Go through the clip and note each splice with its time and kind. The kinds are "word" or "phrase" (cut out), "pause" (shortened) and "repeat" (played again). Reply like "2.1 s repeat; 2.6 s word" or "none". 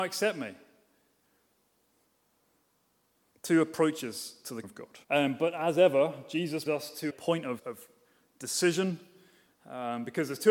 4.6 s word; 5.0 s pause; 6.7 s word; 7.1 s word; 7.6 s word